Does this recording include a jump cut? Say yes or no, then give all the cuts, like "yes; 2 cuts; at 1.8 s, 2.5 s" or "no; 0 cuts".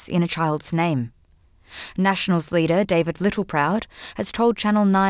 no; 0 cuts